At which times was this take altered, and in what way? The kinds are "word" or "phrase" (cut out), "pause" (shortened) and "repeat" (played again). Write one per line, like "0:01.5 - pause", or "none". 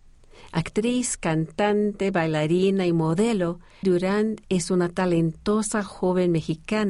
0:03.8 - word